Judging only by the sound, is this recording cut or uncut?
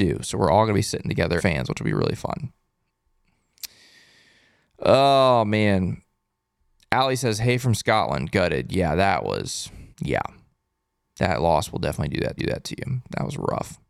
cut